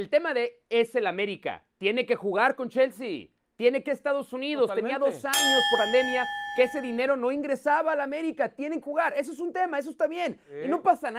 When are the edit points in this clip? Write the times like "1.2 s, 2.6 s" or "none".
3.9 s, 5.8 s, 8.8 s